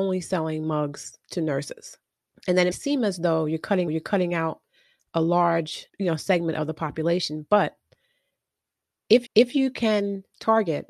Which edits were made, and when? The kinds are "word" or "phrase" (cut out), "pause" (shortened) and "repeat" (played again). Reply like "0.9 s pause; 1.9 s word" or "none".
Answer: 1.2 s pause; 2.3 s pause; 2.7 s word; 3.9 s repeat; 5.9 s pause; 9.3 s repeat

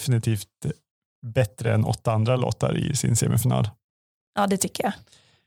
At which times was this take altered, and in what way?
none

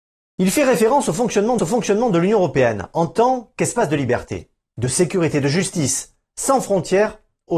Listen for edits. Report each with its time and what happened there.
1.6 s repeat

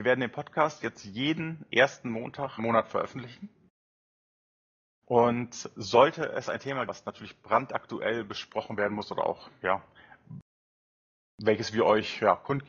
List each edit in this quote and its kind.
2.6 s word; 6.9 s word

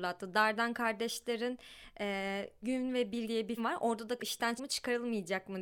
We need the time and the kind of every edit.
2.6 s word; 3.2 s word; 3.6 s word; 4.2 s word; 4.6 s word

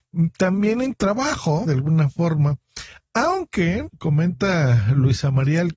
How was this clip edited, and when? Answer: 0.9 s word; 1.7 s phrase; 3.9 s word

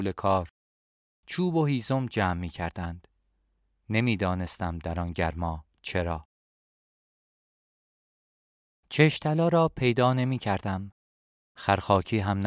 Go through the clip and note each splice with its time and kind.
none

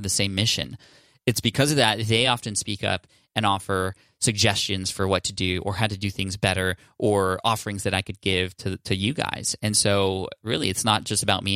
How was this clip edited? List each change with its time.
none

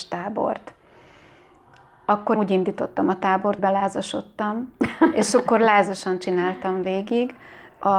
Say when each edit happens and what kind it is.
2.4 s word; 3.6 s word

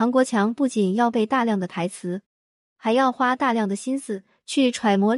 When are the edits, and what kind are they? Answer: 2.5 s pause

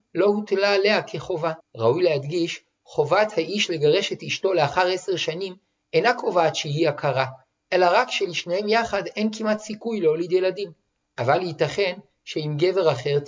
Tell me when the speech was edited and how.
1.6 s pause

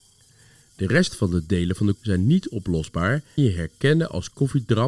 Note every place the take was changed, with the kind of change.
1.9 s word; 3.4 s phrase

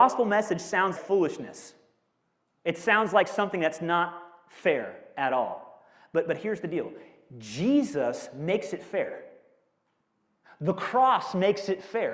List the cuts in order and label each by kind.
1.0 s word

